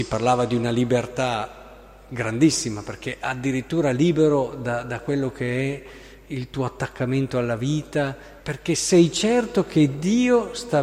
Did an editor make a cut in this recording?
yes; 1 cut; at 8.4 s

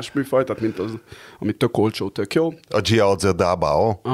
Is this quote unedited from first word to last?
yes; 0 cuts

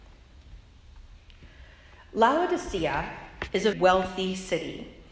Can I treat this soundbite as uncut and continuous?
no; 1 cut; at 3.7 s

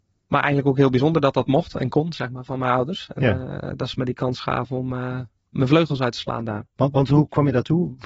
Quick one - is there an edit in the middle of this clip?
no; 0 cuts

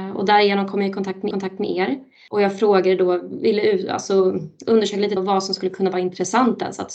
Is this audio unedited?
no; 2 cuts; at 1.3 s, 5.2 s

